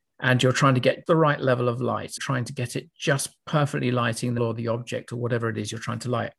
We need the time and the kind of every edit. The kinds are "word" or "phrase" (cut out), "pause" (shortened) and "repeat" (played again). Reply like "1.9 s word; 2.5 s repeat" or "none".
1.1 s word; 2.2 s phrase; 2.9 s pause; 4.4 s word